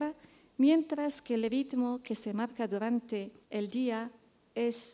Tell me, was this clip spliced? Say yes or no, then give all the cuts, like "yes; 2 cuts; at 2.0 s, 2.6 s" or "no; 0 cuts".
yes; 1 cut; at 3.4 s